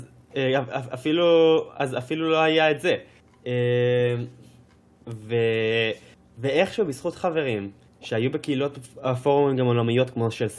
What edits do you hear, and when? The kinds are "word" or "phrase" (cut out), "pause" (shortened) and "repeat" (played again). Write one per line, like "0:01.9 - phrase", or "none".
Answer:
none